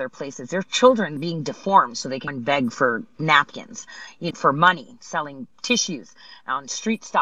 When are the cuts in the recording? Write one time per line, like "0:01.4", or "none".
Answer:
0:01.2
0:02.3
0:04.3